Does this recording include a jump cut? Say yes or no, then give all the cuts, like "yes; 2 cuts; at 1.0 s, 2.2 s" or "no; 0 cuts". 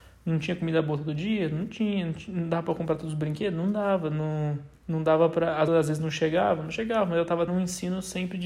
yes; 3 cuts; at 4.8 s, 5.7 s, 7.5 s